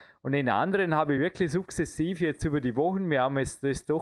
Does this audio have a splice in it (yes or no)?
no